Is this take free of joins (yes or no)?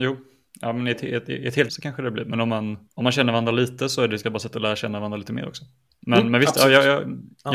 no